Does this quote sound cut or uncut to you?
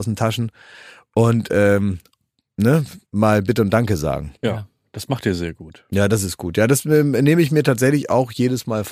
cut